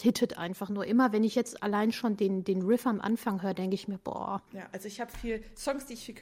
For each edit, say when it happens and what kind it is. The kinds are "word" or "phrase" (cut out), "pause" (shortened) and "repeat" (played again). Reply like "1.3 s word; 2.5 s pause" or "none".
4.5 s pause